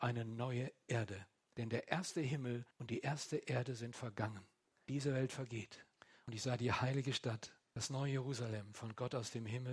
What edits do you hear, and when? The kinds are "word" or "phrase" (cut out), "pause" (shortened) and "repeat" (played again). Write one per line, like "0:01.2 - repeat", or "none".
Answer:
0:02.7 - pause